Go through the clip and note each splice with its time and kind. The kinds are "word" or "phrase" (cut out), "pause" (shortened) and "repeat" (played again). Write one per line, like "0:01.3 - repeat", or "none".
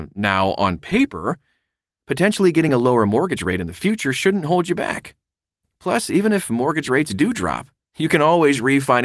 none